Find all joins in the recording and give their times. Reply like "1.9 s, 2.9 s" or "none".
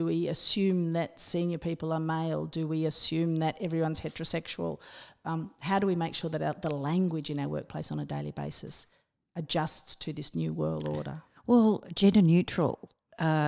none